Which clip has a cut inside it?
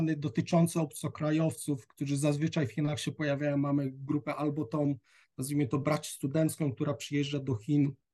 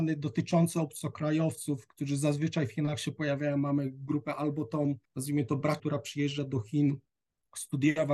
second; 2 cuts; at 5.0 s, 5.8 s

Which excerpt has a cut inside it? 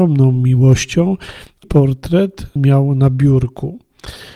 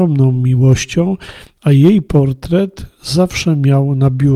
first; 2 cuts; at 1.6 s, 2.6 s

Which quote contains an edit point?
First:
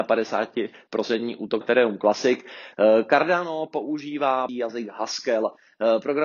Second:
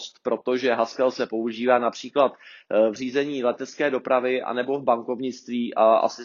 first; 2 cuts; at 1.6 s, 4.5 s

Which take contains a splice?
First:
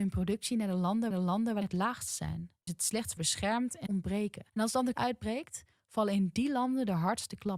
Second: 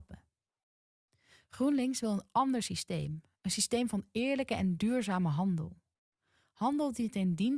first; 7 cuts; at 1.1 s, 1.6 s, 2.7 s, 3.2 s, 3.9 s, 4.5 s, 4.9 s

